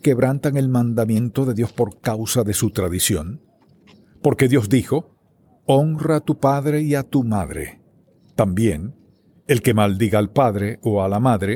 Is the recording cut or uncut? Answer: uncut